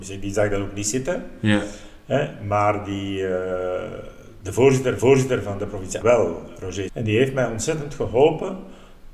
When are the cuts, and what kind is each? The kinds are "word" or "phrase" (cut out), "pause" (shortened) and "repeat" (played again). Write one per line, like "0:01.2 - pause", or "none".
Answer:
0:05.0 - repeat
0:06.0 - word
0:06.9 - word